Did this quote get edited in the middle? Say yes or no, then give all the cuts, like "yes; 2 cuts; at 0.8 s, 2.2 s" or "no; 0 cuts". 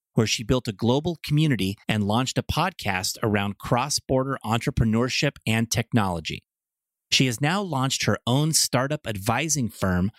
yes; 1 cut; at 1.8 s